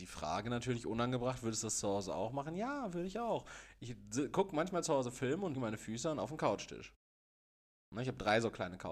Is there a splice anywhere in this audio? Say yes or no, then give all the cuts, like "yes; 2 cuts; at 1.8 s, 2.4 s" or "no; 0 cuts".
yes; 1 cut; at 5.5 s